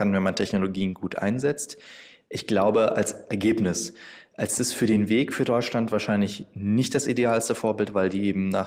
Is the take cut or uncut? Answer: uncut